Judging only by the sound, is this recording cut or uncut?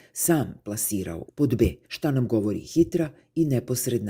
cut